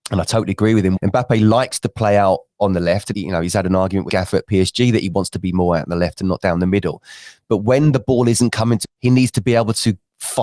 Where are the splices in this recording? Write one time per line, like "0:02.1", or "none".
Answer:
0:01.0
0:03.1
0:04.1
0:08.8